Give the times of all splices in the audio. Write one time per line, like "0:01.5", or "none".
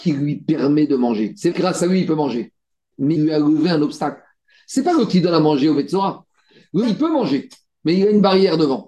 0:01.5
0:03.2
0:05.1
0:06.8